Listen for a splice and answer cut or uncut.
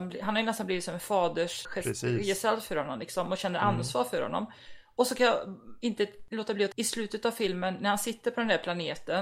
cut